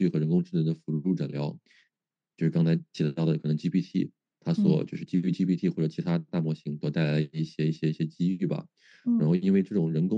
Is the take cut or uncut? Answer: uncut